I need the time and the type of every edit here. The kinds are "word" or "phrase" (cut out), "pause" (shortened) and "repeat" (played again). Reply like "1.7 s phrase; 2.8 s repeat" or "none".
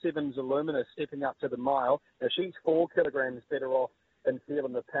2.1 s pause